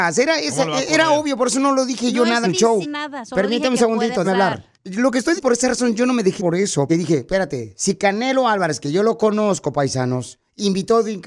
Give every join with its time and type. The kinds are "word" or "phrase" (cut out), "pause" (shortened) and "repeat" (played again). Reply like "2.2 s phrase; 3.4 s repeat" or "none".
2.4 s word; 2.8 s word; 4.2 s word; 4.7 s pause; 5.4 s word; 6.4 s word; 6.9 s word